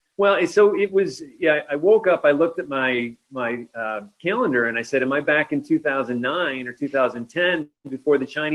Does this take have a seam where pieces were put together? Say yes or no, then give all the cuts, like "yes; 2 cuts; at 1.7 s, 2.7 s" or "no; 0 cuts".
no; 0 cuts